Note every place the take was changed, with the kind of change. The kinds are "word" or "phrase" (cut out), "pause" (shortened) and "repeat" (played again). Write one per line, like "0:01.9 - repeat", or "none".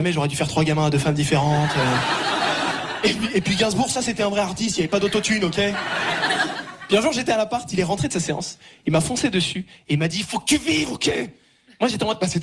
none